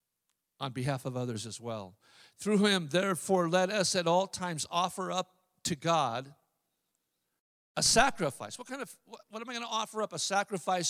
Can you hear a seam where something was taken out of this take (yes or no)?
no